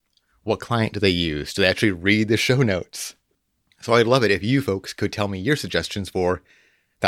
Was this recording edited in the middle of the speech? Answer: no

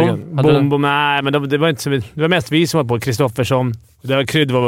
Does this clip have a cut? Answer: no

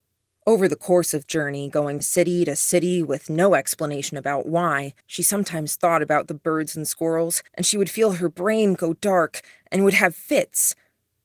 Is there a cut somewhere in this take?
yes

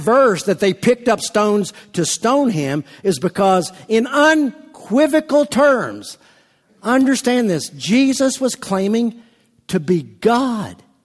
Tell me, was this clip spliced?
no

